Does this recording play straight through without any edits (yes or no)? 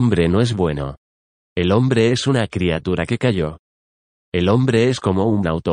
yes